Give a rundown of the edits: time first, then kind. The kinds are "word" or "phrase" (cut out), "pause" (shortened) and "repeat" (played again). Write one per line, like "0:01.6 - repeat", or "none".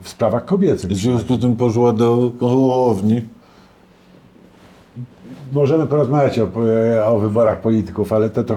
none